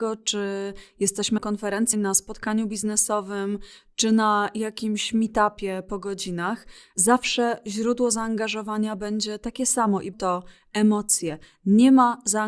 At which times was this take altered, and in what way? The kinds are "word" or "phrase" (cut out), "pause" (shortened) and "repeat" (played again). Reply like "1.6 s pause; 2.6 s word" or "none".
1.4 s word; 1.9 s word; 10.1 s word